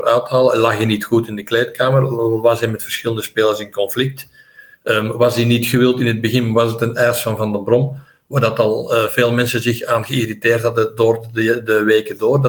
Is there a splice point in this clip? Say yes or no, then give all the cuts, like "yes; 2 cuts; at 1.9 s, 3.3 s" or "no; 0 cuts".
no; 0 cuts